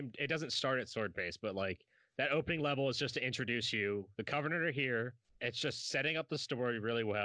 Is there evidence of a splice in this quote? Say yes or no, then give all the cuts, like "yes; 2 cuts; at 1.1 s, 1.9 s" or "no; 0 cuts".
no; 0 cuts